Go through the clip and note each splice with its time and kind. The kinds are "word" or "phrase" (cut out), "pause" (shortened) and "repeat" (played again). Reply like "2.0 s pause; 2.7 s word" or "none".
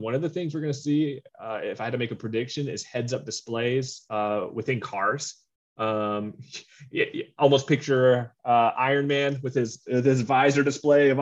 none